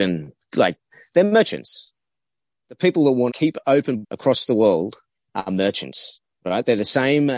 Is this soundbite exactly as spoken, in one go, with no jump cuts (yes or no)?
no